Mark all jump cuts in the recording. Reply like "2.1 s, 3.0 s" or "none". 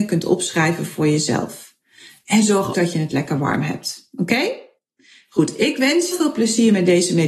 2.7 s, 6.1 s